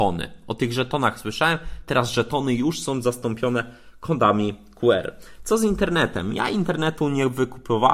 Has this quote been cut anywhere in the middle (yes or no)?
no